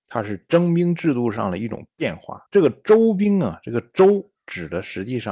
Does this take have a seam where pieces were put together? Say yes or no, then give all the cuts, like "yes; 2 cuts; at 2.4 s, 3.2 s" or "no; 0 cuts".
yes; 1 cut; at 2.5 s